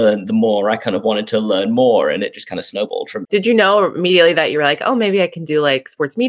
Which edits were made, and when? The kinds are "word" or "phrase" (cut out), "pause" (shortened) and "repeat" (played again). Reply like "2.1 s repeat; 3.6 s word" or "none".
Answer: 3.2 s word